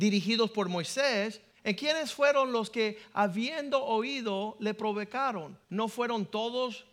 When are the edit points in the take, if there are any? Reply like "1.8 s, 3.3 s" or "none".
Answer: 1.5 s, 5.6 s